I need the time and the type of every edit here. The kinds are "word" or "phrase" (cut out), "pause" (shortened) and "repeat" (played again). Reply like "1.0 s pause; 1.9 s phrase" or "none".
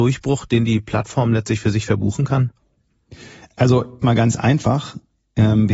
4.0 s phrase